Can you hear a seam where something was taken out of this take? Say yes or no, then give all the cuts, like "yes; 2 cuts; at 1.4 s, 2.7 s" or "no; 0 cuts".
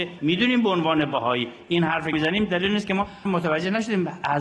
yes; 2 cuts; at 2.1 s, 3.3 s